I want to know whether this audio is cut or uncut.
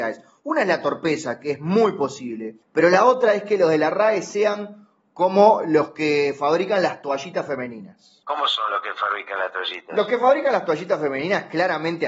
cut